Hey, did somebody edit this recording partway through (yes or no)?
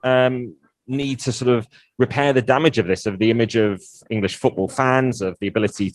no